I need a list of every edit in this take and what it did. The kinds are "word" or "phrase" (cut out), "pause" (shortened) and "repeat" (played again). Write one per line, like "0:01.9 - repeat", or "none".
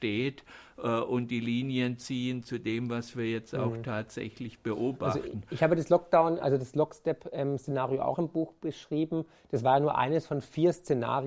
none